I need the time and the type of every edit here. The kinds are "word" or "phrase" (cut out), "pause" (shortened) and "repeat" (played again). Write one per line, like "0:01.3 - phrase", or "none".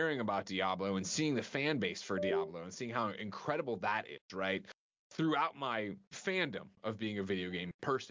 none